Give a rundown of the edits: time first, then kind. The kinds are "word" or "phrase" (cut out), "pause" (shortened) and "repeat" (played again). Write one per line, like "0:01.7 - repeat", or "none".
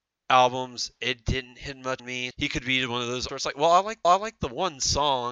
0:02.0 - word
0:02.3 - word
0:03.3 - word
0:04.0 - repeat